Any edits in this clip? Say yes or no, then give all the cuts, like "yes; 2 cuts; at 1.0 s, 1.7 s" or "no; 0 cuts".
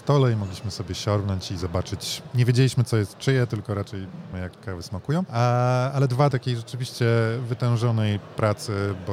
yes; 2 cuts; at 4.3 s, 6.3 s